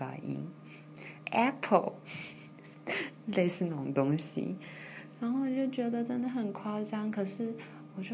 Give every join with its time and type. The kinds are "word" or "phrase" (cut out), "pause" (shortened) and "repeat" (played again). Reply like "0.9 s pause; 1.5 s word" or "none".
1.2 s word